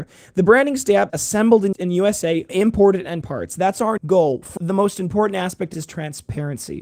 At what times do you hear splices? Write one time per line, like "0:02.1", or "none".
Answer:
0:01.1
0:01.7
0:02.5
0:03.2
0:04.0
0:04.6
0:05.7